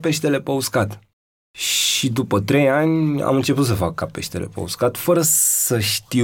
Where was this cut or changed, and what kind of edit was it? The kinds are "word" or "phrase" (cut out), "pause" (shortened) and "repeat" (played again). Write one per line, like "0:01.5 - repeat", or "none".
none